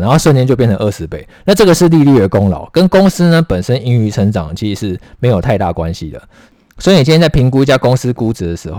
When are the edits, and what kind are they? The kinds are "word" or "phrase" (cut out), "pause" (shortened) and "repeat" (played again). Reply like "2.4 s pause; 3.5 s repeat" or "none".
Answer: none